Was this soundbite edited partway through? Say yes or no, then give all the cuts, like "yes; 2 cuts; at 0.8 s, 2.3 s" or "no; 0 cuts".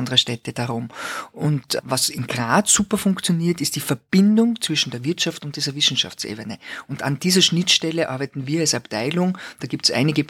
no; 0 cuts